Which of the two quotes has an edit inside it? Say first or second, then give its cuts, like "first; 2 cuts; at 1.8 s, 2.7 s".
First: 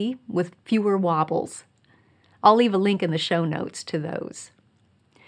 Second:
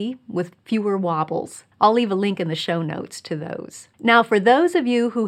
second; 2 cuts; at 1.7 s, 3.9 s